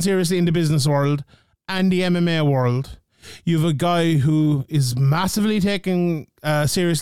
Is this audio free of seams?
yes; 0 cuts

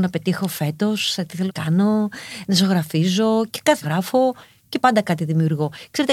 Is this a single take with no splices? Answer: no; 3 cuts; at 1.5 s, 3.8 s, 4.8 s

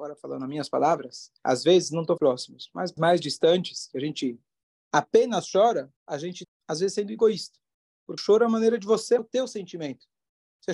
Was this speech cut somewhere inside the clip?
yes; 7 cuts; at 1.4 s, 2.2 s, 3.0 s, 6.0 s, 6.4 s, 8.2 s, 9.2 s

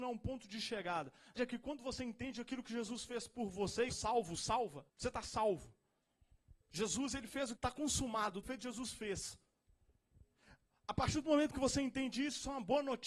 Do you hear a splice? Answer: yes; 6 cuts; at 1.4 s, 3.9 s, 4.9 s, 6.6 s, 7.6 s, 8.4 s

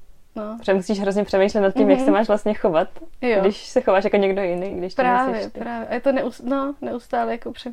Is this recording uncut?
yes; 0 cuts

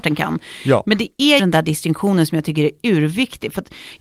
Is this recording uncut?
no; 1 cut; at 1.4 s

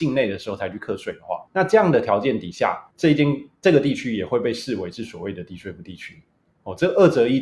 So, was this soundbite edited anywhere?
yes; 2 cuts; at 1.5 s, 2.9 s

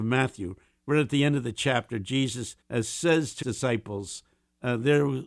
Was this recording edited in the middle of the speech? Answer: yes; 2 cuts; at 2.6 s, 3.4 s

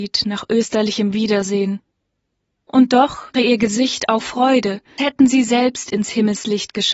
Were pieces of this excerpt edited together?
yes; 4 cuts; at 2.0 s, 3.3 s, 4.2 s, 5.0 s

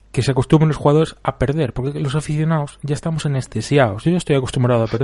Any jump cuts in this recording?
no; 0 cuts

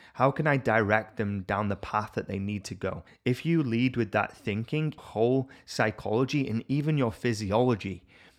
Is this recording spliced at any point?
yes; 2 cuts; at 3.1 s, 5.0 s

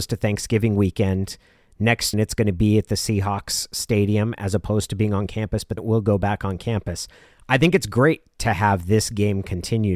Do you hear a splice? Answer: yes; 2 cuts; at 2.1 s, 5.8 s

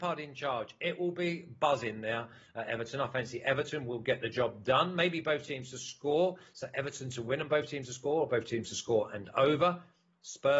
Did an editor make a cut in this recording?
no; 0 cuts

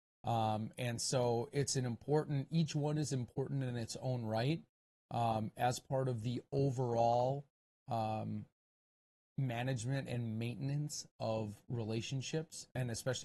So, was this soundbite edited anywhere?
no; 0 cuts

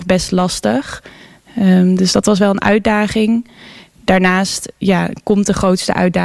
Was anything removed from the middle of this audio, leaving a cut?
no; 0 cuts

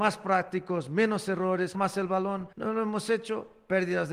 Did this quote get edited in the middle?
yes; 2 cuts; at 1.7 s, 2.5 s

